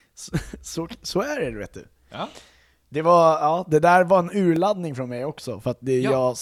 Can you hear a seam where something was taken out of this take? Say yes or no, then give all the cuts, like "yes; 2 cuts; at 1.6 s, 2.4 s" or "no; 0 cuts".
no; 0 cuts